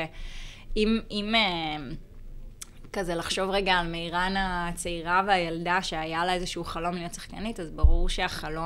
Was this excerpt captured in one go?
yes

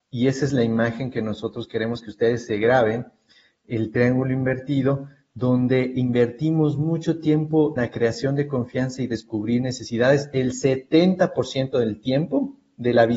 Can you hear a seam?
yes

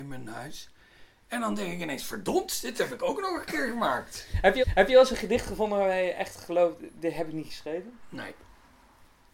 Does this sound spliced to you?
yes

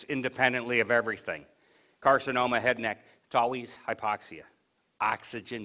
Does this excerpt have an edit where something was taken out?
no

